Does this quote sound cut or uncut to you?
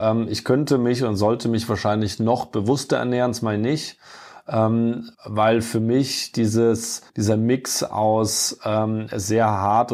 cut